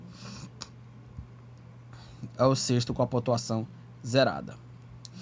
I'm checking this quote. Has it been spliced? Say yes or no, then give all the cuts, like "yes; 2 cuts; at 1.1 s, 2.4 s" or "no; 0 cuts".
yes; 1 cut; at 2.3 s